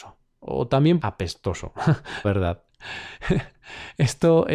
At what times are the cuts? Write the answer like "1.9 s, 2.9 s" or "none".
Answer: 1.0 s, 2.2 s